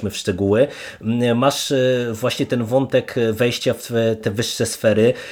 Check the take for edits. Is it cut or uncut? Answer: cut